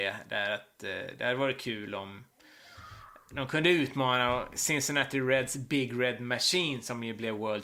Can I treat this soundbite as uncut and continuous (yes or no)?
yes